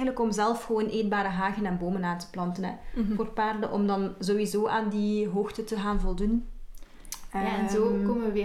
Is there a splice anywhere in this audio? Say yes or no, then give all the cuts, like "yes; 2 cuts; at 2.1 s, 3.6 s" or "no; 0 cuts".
no; 0 cuts